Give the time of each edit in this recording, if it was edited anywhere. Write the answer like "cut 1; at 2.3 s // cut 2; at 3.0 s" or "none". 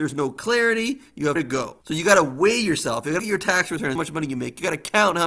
cut 1; at 1.4 s // cut 2; at 1.8 s // cut 3; at 3.2 s // cut 4; at 4.0 s